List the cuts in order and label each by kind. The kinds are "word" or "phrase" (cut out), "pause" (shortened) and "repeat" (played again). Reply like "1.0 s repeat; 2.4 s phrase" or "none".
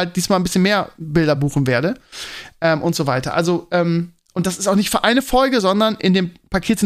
none